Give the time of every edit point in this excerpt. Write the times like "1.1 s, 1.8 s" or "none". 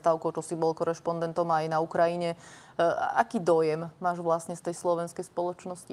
none